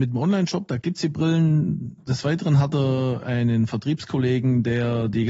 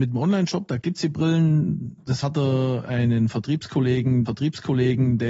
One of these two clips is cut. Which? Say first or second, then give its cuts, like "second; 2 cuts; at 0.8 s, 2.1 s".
second; 2 cuts; at 2.2 s, 4.3 s